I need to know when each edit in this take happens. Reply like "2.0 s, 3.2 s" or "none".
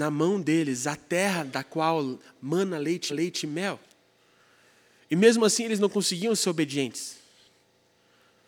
3.1 s